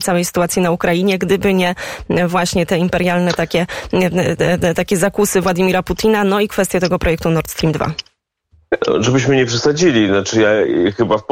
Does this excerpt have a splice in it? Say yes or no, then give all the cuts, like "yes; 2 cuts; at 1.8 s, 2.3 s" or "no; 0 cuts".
no; 0 cuts